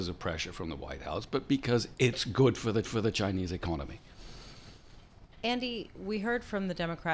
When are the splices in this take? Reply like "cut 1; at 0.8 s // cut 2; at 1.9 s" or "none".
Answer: cut 1; at 2.8 s